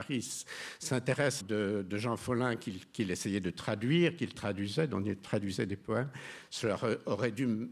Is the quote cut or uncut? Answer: cut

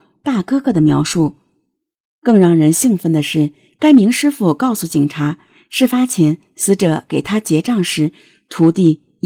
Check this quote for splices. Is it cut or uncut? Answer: uncut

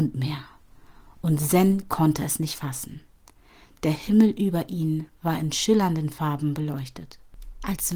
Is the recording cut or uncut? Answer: uncut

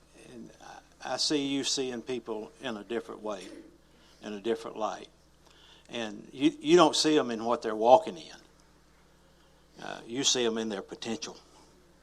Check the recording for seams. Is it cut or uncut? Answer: uncut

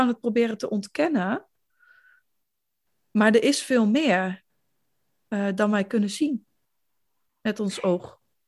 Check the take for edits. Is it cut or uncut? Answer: uncut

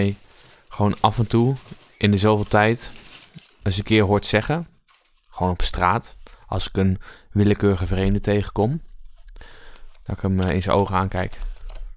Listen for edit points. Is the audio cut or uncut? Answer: uncut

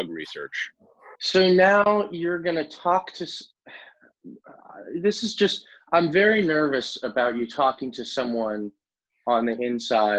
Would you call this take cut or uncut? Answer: cut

